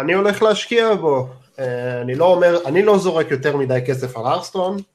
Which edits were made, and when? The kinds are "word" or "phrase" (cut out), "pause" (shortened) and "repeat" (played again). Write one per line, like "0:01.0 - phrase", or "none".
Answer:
none